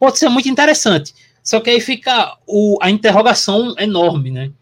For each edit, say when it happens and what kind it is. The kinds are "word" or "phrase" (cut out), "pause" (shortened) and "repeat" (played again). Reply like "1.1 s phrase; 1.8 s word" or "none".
none